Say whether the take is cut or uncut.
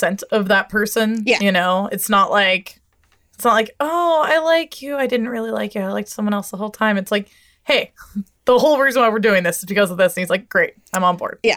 uncut